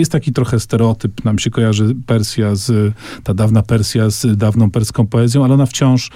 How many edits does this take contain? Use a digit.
0